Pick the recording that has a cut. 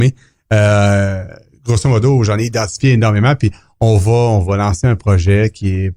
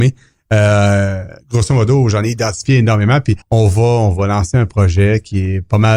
second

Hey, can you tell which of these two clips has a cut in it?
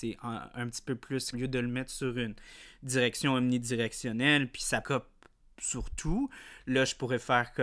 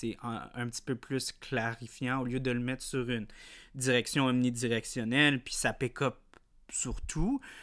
first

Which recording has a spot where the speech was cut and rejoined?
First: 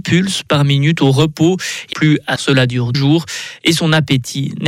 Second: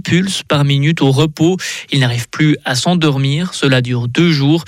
first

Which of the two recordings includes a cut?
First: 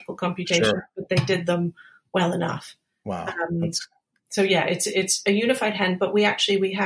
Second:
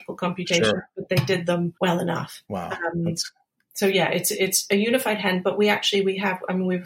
second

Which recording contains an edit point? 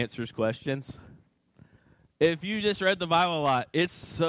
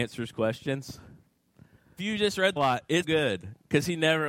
second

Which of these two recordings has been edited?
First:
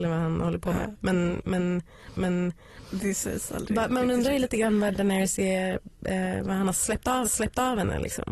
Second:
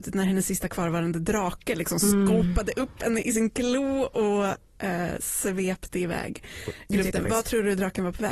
first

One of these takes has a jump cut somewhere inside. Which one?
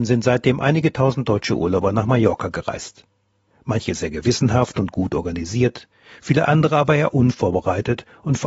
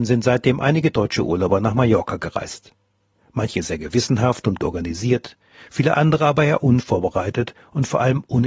second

